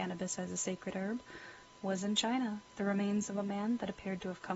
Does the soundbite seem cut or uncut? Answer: cut